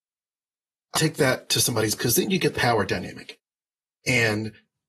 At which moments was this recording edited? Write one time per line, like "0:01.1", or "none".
0:00.9
0:02.0
0:02.5